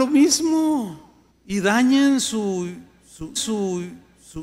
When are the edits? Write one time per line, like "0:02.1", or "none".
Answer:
0:01.3
0:03.4